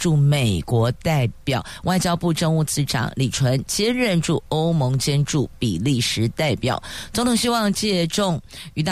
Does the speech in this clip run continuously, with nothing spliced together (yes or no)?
yes